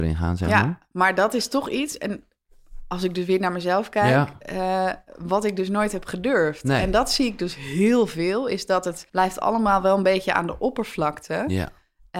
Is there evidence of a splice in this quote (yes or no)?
yes